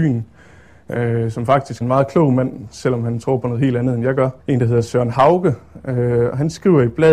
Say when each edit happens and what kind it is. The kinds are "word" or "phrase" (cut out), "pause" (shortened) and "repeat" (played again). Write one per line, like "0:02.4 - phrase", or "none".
0:01.8 - word
0:04.4 - pause